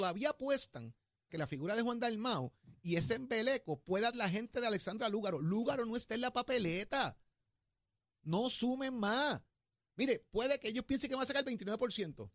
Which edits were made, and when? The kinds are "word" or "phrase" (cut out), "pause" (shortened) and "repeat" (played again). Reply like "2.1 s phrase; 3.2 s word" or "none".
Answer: 1.3 s word; 4.1 s word